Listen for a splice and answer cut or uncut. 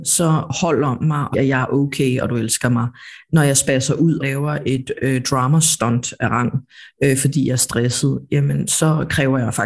cut